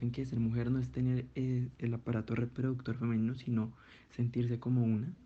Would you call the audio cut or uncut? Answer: uncut